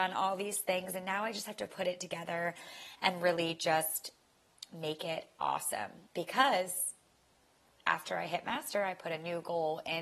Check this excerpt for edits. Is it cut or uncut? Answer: cut